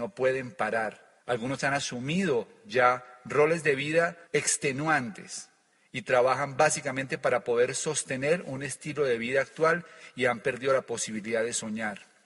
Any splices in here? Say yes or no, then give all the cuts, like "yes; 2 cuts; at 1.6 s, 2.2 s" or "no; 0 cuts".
yes; 2 cuts; at 1.2 s, 4.2 s